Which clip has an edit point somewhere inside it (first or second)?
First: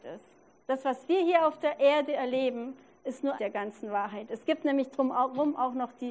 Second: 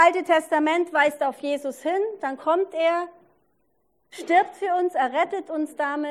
first